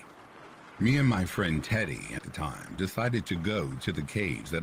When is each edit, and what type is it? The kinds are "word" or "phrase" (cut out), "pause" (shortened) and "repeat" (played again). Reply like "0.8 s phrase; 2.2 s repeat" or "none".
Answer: 2.2 s phrase

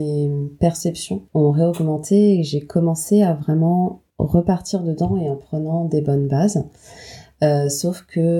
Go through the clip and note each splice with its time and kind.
1.3 s pause; 4.1 s pause

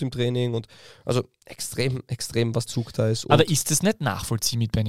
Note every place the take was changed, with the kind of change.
2.7 s phrase

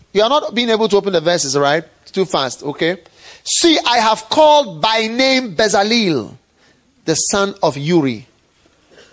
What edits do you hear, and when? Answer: none

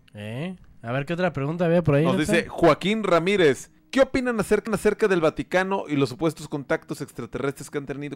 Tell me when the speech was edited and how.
3.8 s pause; 4.7 s repeat

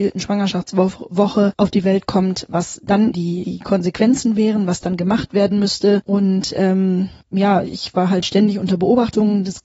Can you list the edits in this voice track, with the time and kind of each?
3.1 s word

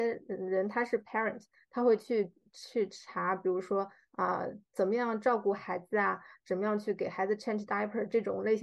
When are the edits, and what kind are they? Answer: none

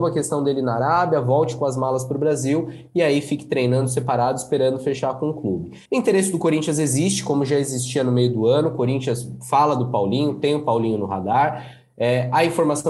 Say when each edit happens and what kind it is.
5.9 s pause

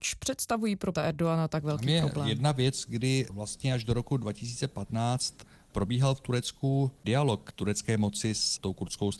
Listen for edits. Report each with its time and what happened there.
0.9 s word; 7.0 s pause

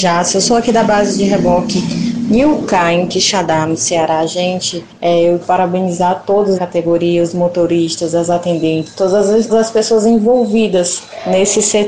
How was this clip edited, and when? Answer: 5.4 s word; 6.6 s word; 9.5 s word

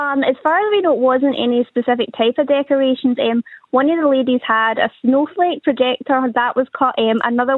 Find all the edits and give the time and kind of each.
none

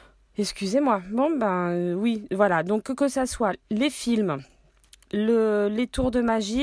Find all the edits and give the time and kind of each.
3.6 s pause

